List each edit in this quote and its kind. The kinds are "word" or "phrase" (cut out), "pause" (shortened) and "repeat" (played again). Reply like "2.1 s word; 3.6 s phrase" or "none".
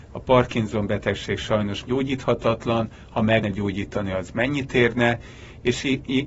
1.9 s word; 3.4 s word

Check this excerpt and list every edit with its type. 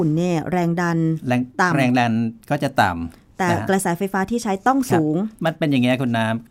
5.4 s pause

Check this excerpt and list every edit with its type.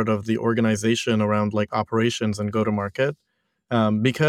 none

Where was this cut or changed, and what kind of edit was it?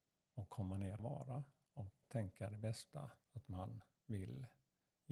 1.0 s phrase; 2.0 s word; 3.2 s pause

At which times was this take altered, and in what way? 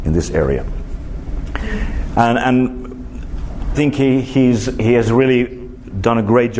3.7 s word

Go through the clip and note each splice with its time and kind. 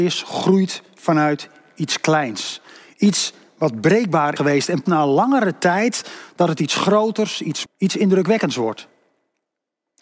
4.4 s word; 4.9 s word; 7.6 s word

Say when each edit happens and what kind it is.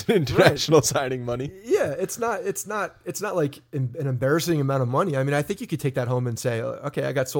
none

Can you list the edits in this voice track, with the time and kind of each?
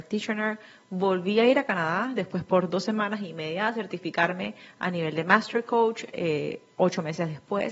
none

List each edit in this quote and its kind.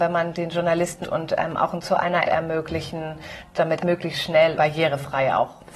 1.0 s word; 1.8 s word; 2.2 s word; 3.8 s word; 4.6 s word

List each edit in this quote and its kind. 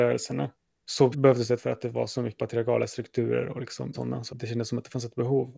1.1 s word; 1.6 s word; 2.4 s word; 3.9 s word; 4.3 s word

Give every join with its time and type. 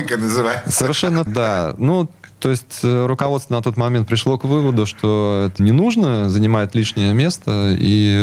1.3 s word; 5.6 s word

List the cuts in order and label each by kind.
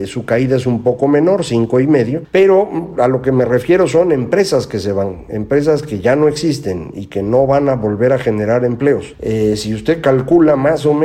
none

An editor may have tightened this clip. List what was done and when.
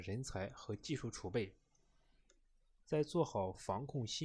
none

